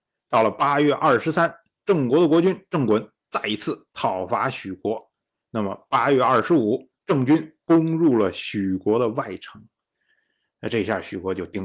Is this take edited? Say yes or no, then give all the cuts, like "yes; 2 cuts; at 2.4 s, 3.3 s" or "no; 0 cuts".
no; 0 cuts